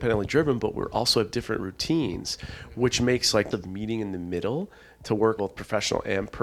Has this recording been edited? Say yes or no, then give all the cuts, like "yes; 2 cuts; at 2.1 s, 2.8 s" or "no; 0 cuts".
yes; 2 cuts; at 3.5 s, 5.4 s